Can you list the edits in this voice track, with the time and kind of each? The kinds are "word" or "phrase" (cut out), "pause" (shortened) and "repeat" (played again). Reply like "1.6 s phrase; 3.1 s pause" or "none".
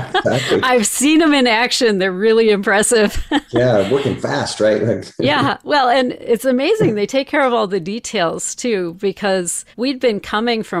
9.7 s pause